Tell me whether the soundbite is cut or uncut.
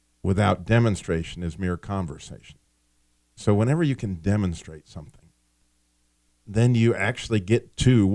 uncut